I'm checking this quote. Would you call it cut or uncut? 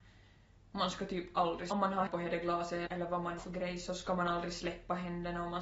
cut